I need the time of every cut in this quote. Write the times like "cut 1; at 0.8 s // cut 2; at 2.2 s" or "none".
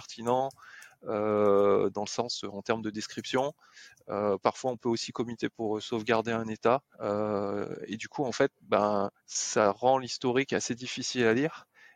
cut 1; at 6.9 s // cut 2; at 9.2 s